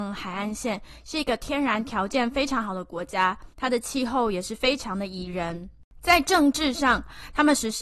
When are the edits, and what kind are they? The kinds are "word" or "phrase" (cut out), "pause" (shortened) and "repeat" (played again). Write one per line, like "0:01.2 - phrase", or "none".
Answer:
0:03.5 - pause